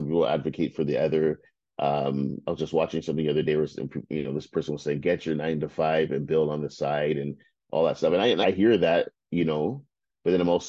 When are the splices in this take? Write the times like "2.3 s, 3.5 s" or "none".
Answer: 8.4 s